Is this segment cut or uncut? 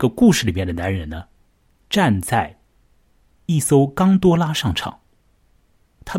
uncut